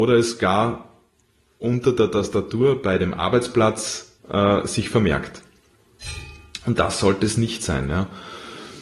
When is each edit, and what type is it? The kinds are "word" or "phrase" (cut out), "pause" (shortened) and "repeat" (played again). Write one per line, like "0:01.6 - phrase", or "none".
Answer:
0:04.2 - pause